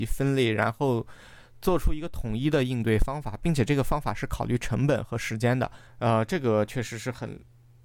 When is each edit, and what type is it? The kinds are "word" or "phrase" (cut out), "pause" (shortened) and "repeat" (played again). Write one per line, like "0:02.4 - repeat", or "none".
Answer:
0:05.9 - pause